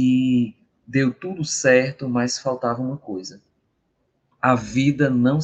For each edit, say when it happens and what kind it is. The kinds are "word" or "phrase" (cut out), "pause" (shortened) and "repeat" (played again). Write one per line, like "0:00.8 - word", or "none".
none